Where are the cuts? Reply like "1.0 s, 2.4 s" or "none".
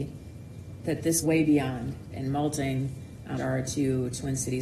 1.2 s, 2.1 s, 3.4 s